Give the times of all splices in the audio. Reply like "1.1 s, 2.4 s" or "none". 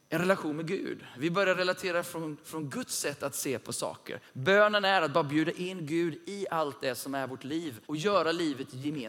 7.8 s